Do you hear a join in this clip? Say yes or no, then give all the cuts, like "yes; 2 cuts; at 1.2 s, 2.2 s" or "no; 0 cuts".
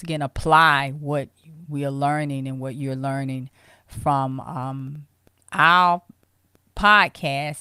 no; 0 cuts